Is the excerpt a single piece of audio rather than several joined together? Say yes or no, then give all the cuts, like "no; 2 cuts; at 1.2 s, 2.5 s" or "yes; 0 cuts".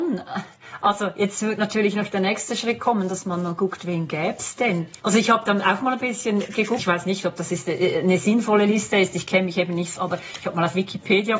no; 3 cuts; at 5.0 s, 6.8 s, 10.0 s